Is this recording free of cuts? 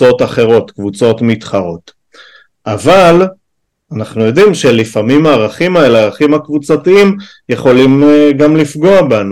yes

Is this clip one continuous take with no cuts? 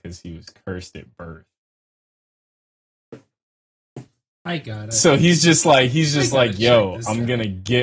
yes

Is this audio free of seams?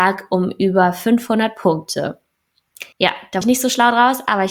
no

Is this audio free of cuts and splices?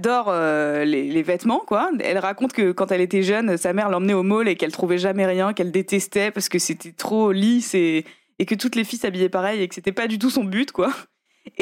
yes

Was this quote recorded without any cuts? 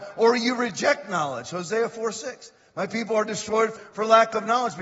no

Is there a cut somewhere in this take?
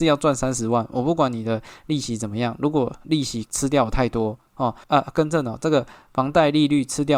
yes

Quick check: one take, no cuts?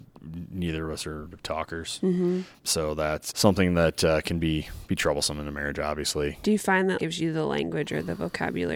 no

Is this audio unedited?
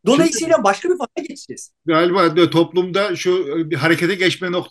yes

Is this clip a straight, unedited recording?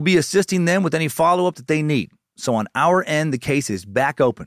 yes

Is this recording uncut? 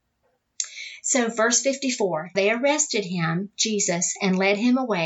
no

